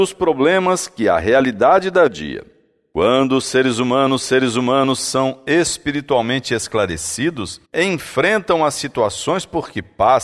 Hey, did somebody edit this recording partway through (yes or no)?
yes